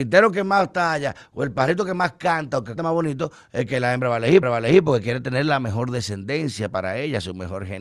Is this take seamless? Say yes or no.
no